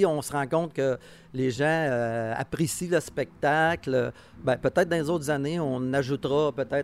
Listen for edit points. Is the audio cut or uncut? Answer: uncut